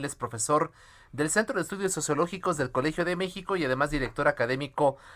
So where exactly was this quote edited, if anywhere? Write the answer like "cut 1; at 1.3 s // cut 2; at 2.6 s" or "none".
none